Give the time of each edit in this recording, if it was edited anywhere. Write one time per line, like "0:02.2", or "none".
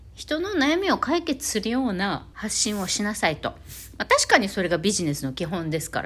0:02.3